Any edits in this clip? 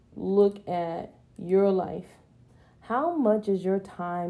yes; 2 cuts; at 1.2 s, 2.5 s

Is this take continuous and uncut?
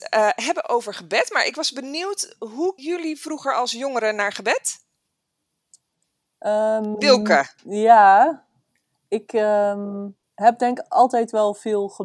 no; 3 cuts; at 2.8 s, 7.6 s, 10.2 s

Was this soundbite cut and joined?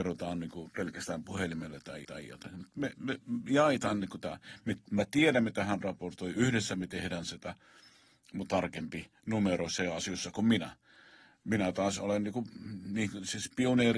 yes; 3 cuts; at 2.0 s, 2.9 s, 8.5 s

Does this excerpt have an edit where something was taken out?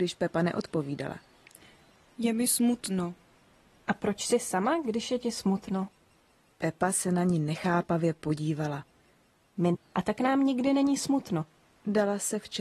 yes; 1 cut; at 9.7 s

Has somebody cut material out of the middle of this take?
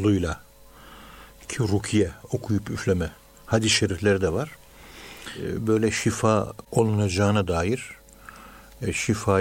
yes; 1 cut; at 6.6 s

